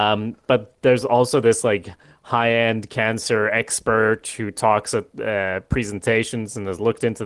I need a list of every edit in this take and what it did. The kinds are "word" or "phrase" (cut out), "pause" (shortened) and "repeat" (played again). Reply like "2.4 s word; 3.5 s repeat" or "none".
none